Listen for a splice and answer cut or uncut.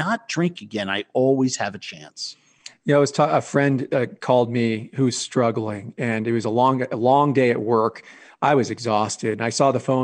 uncut